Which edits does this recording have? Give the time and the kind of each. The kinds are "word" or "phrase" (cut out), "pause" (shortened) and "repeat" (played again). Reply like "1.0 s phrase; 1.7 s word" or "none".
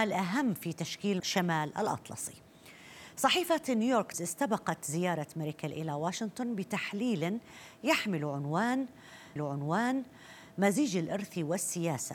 1.2 s word; 4.1 s word; 9.4 s repeat